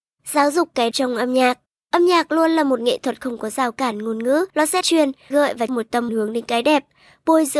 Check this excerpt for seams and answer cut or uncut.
cut